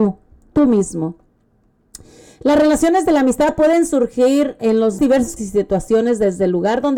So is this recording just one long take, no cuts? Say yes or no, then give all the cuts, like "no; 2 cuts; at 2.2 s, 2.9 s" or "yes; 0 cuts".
no; 3 cuts; at 4.6 s, 5.0 s, 5.4 s